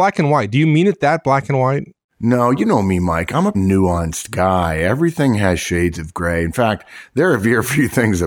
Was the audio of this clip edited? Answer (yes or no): yes